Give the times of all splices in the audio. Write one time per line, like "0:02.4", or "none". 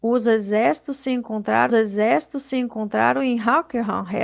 0:01.7